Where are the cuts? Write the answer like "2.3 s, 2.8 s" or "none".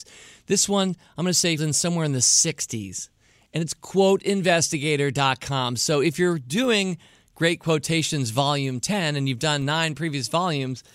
1.6 s